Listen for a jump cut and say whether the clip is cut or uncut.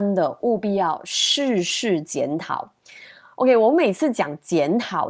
uncut